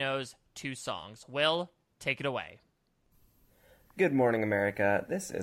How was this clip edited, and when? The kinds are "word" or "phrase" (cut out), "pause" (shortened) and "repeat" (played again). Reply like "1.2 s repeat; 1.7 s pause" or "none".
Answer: none